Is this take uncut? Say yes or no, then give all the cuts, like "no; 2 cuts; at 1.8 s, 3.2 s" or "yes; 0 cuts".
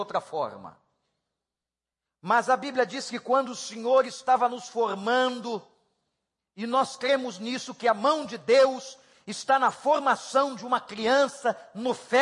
yes; 0 cuts